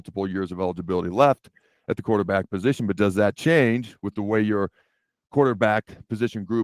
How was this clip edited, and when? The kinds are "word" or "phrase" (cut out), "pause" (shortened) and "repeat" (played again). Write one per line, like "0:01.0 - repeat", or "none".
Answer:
none